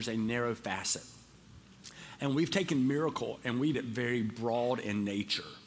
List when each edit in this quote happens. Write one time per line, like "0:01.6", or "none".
0:03.7